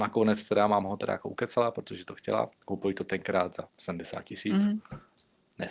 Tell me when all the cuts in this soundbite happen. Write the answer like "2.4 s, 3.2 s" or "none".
3.7 s